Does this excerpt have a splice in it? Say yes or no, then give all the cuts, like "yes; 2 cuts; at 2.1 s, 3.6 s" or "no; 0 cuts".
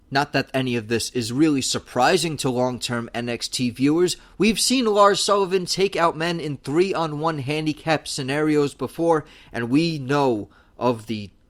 no; 0 cuts